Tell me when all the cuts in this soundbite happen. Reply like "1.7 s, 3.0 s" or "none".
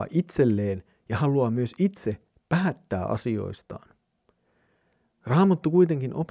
none